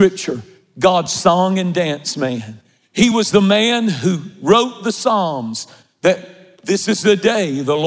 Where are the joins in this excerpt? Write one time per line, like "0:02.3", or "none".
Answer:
none